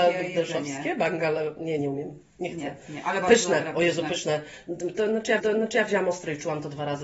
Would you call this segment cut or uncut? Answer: cut